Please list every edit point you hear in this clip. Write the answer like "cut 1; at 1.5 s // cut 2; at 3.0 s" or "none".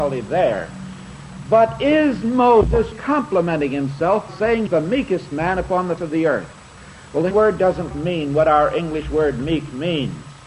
cut 1; at 2.9 s // cut 2; at 4.3 s // cut 3; at 4.7 s // cut 4; at 6.0 s // cut 5; at 7.3 s // cut 6; at 7.9 s